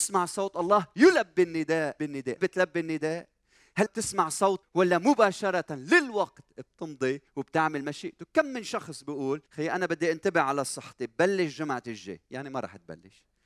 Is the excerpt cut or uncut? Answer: cut